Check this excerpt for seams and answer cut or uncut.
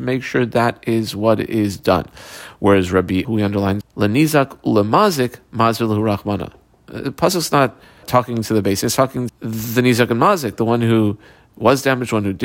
cut